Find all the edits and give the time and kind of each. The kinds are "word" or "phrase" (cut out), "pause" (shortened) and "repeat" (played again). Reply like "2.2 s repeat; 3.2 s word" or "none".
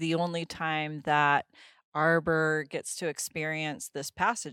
none